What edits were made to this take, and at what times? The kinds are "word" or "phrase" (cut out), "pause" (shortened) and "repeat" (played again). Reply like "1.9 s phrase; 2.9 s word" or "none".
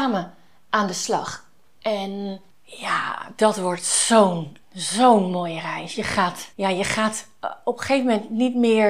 2.5 s pause; 4.6 s pause; 6.5 s pause

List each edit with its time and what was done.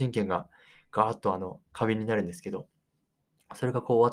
1.7 s pause

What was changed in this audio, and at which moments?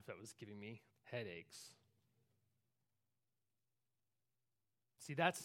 0.9 s pause

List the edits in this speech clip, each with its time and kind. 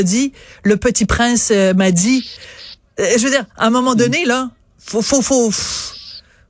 none

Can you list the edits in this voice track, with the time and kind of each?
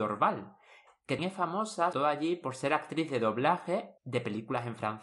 1.2 s word; 1.9 s word; 4.0 s pause

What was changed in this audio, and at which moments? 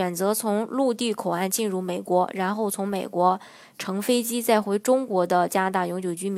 none

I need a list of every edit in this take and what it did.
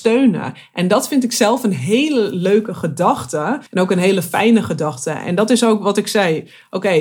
3.7 s pause

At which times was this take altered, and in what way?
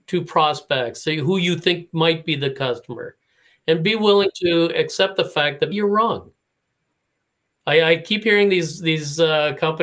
5.7 s word

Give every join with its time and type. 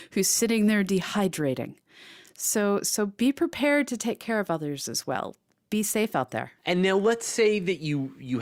6.6 s pause

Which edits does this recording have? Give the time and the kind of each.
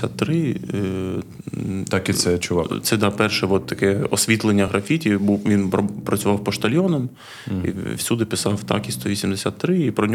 none

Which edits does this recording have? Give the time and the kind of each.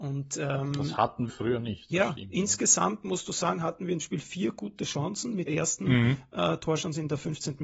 1.3 s word; 4.0 s word; 5.5 s word

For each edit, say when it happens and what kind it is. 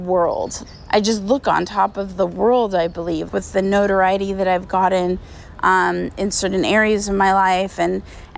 3.3 s word

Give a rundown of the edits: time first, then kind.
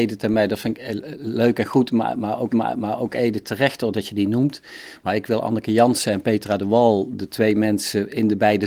2.5 s repeat

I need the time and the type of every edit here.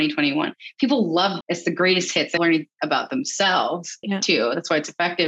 1.4 s word; 2.4 s word; 4.0 s word

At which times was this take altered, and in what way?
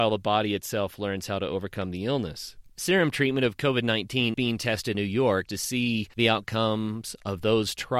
2.7 s pause; 4.3 s word; 4.9 s word; 5.5 s phrase

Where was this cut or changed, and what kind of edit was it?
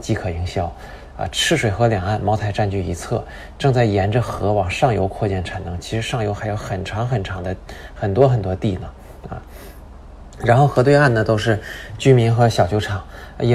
none

